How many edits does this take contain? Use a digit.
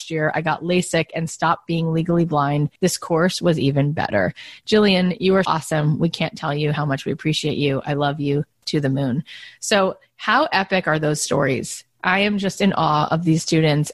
2